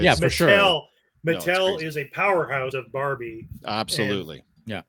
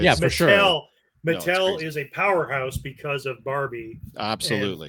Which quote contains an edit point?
first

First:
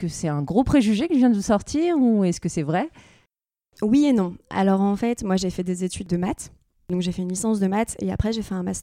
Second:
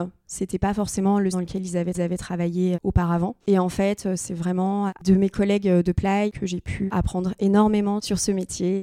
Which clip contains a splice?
second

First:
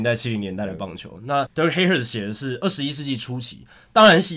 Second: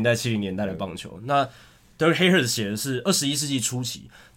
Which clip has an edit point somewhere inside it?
first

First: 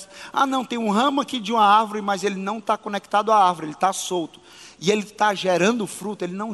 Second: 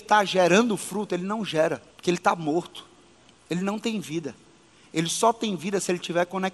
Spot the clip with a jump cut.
second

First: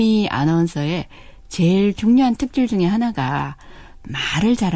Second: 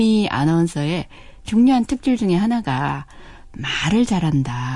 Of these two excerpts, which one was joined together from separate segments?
second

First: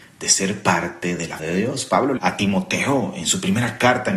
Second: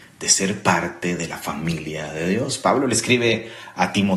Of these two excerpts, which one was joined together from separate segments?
first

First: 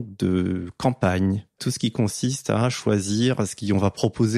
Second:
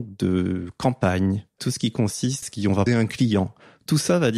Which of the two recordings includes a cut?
second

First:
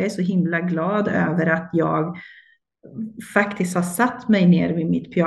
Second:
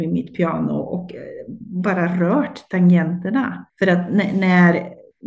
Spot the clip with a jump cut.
second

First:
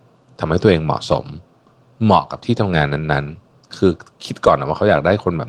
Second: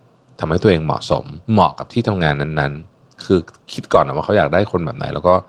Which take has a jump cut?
second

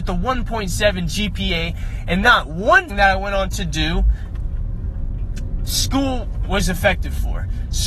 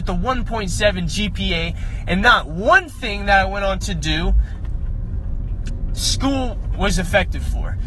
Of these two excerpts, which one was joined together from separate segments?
first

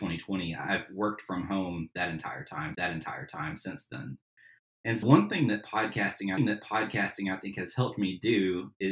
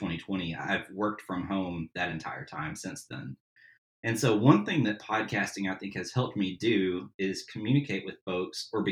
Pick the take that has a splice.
first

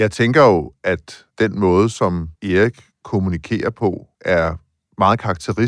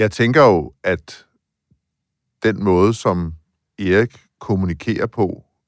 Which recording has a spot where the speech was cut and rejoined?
first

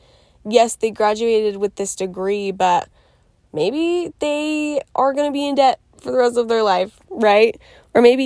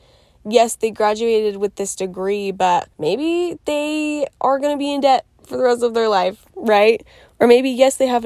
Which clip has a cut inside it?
second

